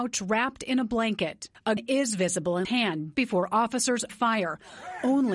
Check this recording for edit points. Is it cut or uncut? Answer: cut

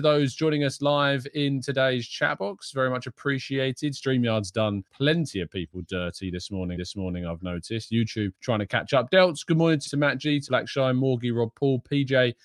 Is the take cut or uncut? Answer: cut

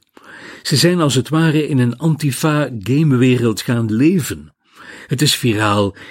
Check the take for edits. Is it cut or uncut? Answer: uncut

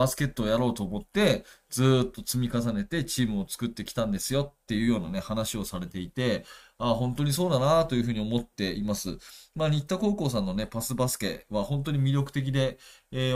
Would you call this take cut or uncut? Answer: uncut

